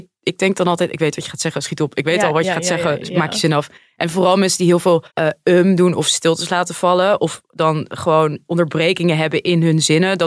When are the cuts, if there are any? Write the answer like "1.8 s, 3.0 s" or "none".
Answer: 5.1 s